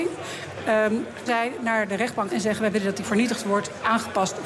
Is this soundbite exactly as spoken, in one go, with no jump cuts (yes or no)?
no